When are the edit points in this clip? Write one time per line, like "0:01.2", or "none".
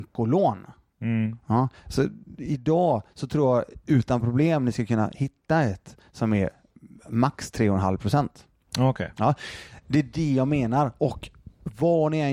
none